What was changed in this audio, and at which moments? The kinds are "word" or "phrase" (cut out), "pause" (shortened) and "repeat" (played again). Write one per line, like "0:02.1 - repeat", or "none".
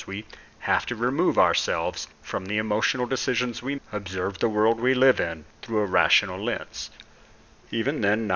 0:02.1 - pause
0:03.8 - phrase
0:05.5 - pause